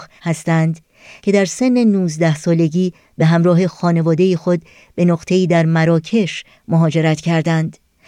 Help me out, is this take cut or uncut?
uncut